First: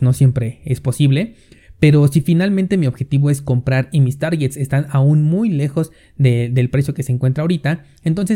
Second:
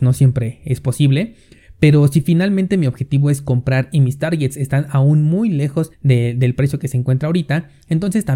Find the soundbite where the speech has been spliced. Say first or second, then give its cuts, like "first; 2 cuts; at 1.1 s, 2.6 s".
second; 1 cut; at 5.9 s